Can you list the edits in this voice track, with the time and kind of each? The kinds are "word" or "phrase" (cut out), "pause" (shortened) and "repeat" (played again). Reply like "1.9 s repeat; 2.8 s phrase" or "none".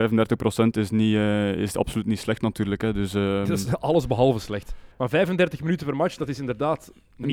4.9 s pause